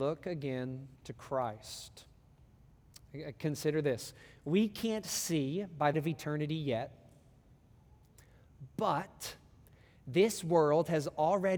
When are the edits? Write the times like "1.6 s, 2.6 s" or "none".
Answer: 0.9 s, 5.9 s